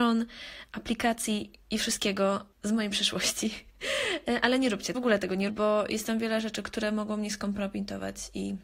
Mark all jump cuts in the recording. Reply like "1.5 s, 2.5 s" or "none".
2.5 s, 4.9 s, 5.5 s